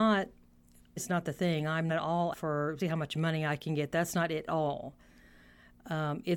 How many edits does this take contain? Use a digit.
5